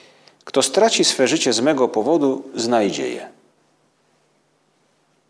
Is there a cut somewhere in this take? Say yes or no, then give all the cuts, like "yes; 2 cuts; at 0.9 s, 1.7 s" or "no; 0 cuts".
no; 0 cuts